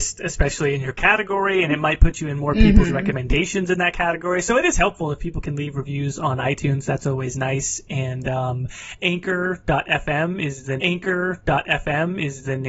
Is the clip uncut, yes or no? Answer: no